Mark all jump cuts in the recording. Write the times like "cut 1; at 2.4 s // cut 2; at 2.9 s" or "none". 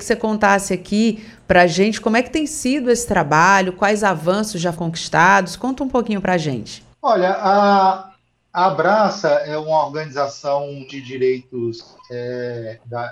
cut 1; at 4.7 s // cut 2; at 6.9 s // cut 3; at 10.9 s

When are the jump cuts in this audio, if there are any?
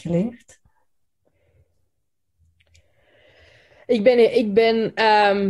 none

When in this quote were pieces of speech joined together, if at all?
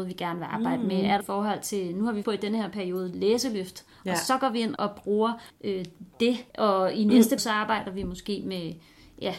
cut 1; at 1.2 s // cut 2; at 2.2 s // cut 3; at 4.8 s // cut 4; at 5.5 s // cut 5; at 6.5 s // cut 6; at 7.4 s

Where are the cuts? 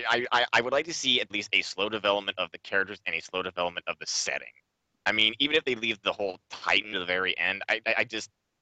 cut 1; at 1.3 s // cut 2; at 6.9 s // cut 3; at 7.6 s

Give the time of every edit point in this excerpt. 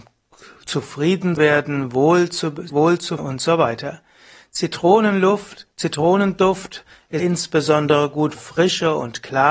cut 1; at 1.4 s // cut 2; at 2.7 s // cut 3; at 3.2 s // cut 4; at 7.2 s // cut 5; at 8.4 s

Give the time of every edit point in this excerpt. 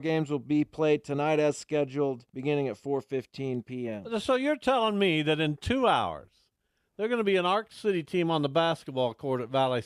cut 1; at 2.3 s

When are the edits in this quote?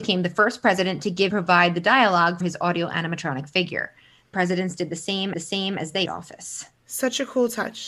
cut 1; at 1.3 s // cut 2; at 2.4 s // cut 3; at 4.3 s // cut 4; at 5.3 s // cut 5; at 6.1 s

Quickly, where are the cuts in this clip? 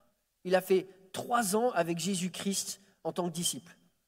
none

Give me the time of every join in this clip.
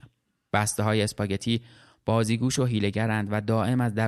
none

